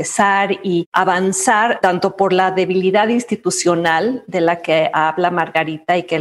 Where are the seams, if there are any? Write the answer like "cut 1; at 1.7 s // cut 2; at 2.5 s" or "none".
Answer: none